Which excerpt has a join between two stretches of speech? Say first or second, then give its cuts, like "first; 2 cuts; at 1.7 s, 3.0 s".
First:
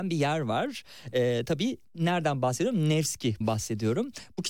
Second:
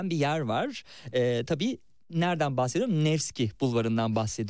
first; 2 cuts; at 1.8 s, 3.4 s